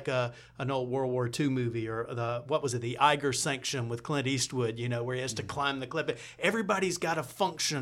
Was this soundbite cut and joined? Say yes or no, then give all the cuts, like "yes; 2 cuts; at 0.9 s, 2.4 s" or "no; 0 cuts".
no; 0 cuts